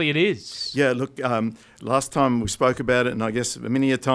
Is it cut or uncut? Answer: uncut